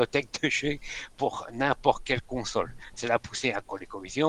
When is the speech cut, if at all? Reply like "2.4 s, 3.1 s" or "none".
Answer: none